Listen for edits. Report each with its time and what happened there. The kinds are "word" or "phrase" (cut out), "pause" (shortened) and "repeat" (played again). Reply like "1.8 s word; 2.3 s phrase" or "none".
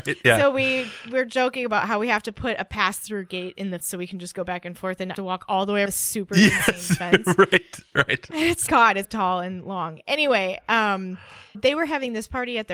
3.8 s word; 5.1 s word; 5.9 s word; 8.7 s word; 9.0 s word; 11.5 s word